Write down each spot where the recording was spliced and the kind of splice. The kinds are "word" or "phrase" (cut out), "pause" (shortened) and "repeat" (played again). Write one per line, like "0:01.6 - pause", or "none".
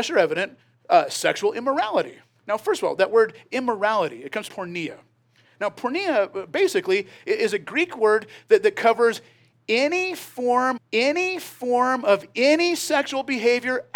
0:02.4 - pause
0:04.5 - phrase
0:10.8 - repeat

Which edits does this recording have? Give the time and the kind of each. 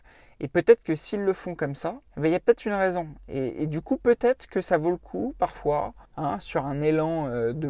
0:02.1 - pause
0:06.1 - pause

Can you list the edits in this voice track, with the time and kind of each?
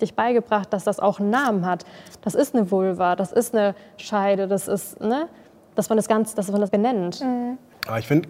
0:06.7 - word

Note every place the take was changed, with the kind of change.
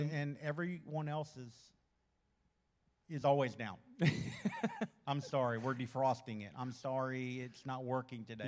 none

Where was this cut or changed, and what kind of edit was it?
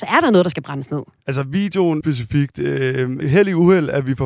0:02.0 - word
0:03.2 - word

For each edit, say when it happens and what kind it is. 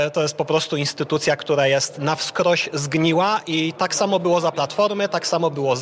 none

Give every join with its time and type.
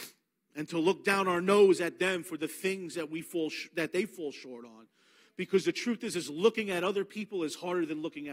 none

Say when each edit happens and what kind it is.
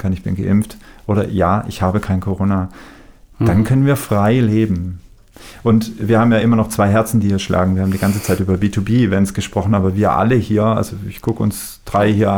none

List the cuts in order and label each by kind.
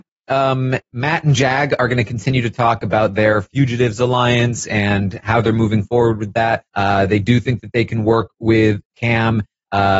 0:06.7 - pause

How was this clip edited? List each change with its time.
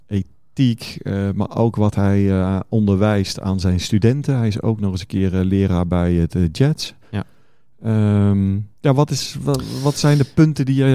0:08.8 - pause

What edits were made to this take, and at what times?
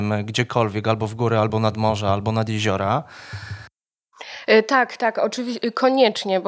none

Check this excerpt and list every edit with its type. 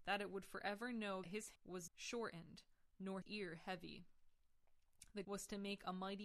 0:01.2 - word
0:01.6 - word
0:01.9 - word
0:03.2 - word
0:05.2 - word

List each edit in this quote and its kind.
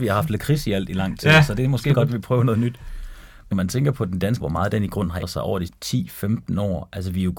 0:01.9 - word
0:03.5 - word
0:04.4 - word
0:05.2 - word
0:05.7 - word

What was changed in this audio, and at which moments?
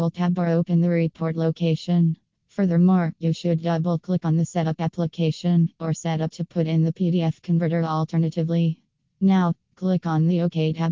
0:06.3 - word

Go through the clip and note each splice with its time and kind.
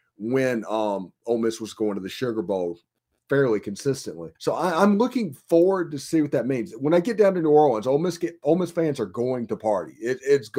0:04.3 - pause

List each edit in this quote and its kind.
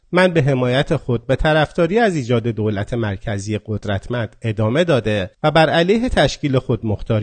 0:05.3 - pause

